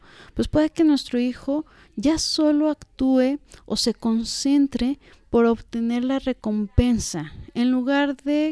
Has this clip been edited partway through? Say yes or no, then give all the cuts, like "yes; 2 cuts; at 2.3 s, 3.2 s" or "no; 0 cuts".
no; 0 cuts